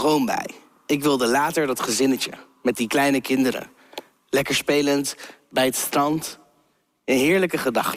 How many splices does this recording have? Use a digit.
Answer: 0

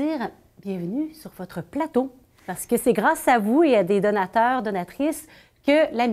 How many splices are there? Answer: 0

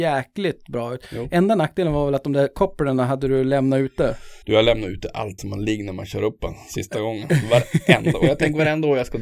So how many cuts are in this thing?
2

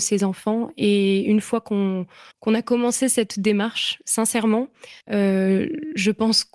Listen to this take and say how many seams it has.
2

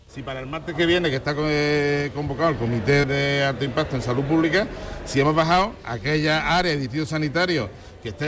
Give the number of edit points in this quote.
1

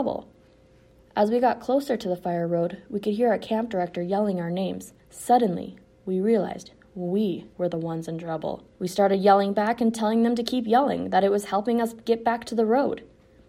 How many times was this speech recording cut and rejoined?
3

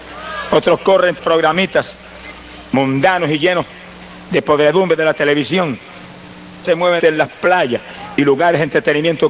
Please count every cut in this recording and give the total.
3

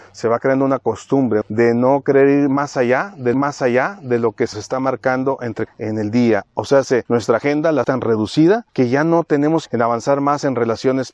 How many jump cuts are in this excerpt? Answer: 8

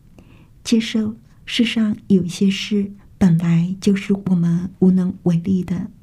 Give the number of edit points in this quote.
1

